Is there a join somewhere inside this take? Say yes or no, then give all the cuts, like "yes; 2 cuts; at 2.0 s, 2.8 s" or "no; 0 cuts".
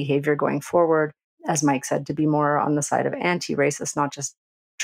no; 0 cuts